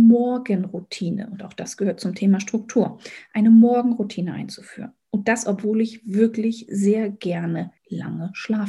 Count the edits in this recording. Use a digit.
1